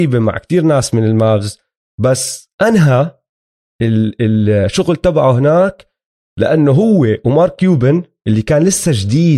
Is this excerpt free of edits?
yes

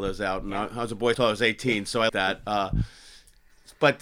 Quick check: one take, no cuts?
no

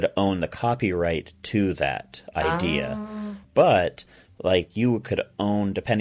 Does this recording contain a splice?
no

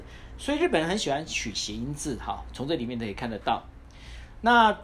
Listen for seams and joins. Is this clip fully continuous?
yes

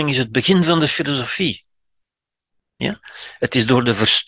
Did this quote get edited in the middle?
no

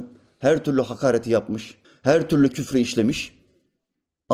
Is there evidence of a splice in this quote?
yes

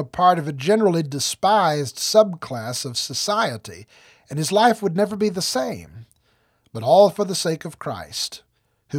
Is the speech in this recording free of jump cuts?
yes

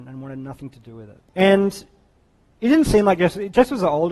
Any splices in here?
yes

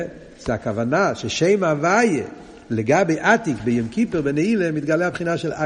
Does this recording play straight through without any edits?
yes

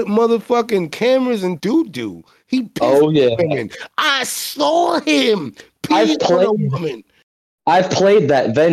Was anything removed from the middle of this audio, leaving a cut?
yes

